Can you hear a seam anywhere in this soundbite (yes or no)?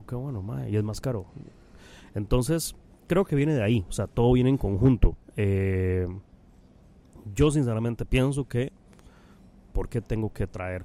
no